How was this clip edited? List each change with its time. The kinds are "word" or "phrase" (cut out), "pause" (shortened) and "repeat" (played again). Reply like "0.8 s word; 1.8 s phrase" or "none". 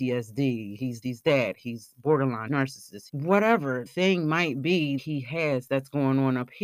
1.0 s word; 2.5 s word; 3.1 s word; 3.9 s word; 5.0 s word